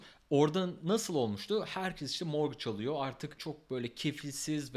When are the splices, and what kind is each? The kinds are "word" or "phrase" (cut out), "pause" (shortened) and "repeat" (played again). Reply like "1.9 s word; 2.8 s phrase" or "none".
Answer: none